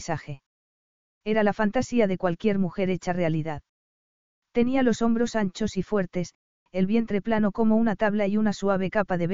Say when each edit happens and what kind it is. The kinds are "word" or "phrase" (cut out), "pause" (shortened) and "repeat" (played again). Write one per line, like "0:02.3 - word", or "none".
none